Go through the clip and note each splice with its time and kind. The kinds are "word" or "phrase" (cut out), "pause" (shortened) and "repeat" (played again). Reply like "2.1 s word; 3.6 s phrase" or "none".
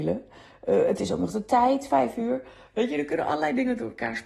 none